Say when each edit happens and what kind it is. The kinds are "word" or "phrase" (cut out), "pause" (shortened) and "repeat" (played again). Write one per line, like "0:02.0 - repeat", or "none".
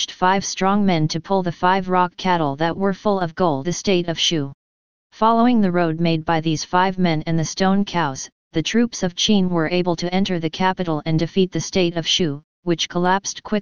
0:03.6 - word

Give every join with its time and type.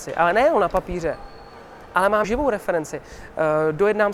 0:02.2 - word

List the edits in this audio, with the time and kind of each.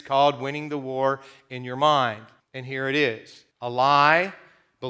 0:02.4 - pause
0:03.5 - pause

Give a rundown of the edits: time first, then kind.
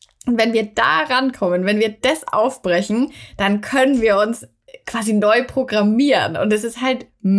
none

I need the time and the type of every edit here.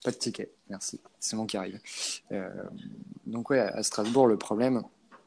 0:01.5 - word

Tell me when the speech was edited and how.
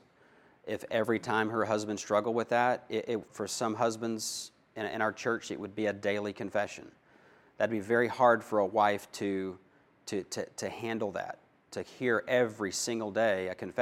0:03.3 - word

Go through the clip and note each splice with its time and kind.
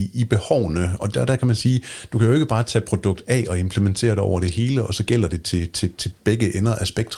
none

